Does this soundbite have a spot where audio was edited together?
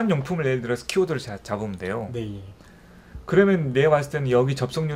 no; 0 cuts

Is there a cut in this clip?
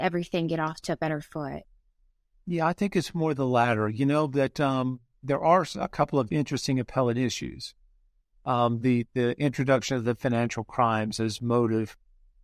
no; 0 cuts

